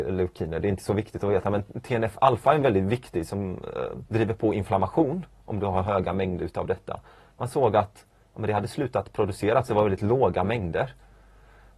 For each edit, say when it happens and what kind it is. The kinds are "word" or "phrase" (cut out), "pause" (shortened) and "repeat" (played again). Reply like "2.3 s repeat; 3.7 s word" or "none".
4.1 s pause